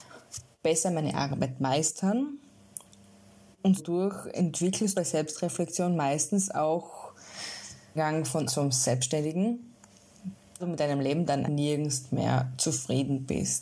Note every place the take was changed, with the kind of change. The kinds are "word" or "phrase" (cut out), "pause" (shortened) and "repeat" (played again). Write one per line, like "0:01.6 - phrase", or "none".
0:03.8 - word
0:04.9 - word
0:08.0 - word
0:08.5 - word
0:10.6 - word
0:11.4 - word